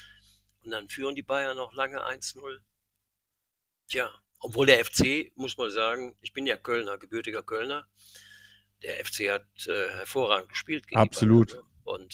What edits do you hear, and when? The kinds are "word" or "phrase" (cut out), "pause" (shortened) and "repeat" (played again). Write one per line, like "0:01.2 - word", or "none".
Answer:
none

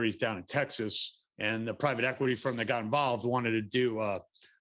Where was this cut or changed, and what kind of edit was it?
0:01.3 - pause

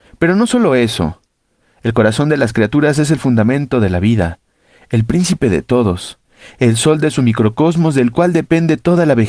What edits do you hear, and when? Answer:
none

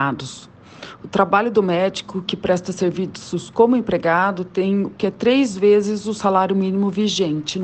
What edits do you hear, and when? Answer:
0:05.0 - phrase

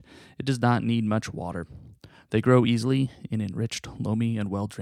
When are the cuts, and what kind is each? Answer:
none

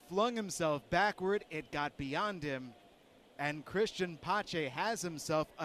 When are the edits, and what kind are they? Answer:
none

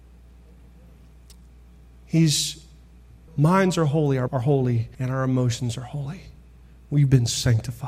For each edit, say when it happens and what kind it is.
0:03.3 - word
0:04.3 - word
0:04.9 - pause

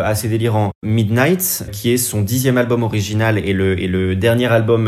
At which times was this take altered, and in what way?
0:01.7 - word

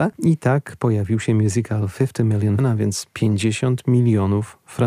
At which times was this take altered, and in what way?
0:02.6 - word

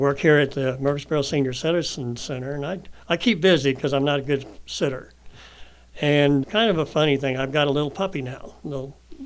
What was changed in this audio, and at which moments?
0:06.4 - word

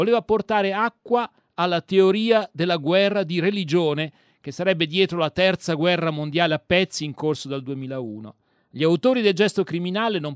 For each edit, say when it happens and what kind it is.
none

